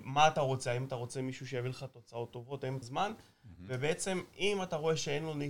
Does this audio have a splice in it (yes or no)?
yes